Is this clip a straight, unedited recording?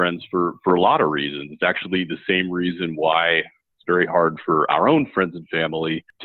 yes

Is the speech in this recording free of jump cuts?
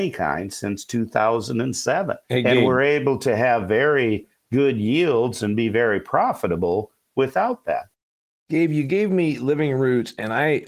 no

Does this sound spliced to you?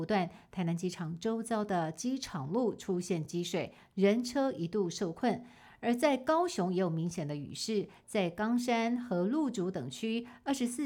no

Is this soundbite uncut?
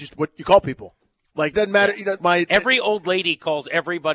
no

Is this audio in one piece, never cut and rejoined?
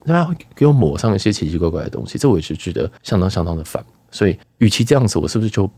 no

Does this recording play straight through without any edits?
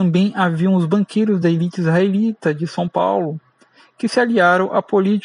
yes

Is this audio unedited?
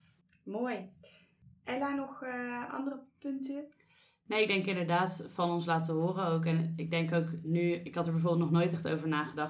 yes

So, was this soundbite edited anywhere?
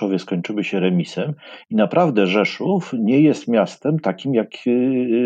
no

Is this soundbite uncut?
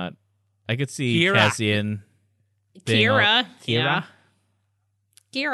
yes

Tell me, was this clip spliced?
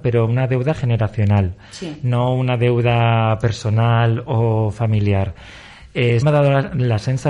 yes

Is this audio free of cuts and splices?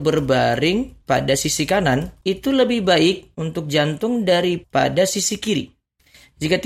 yes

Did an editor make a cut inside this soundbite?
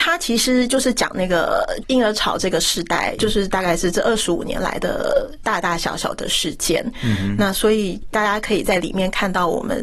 yes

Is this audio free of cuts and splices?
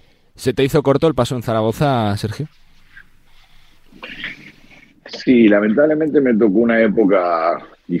yes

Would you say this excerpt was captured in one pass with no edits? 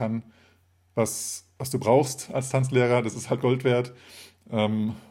yes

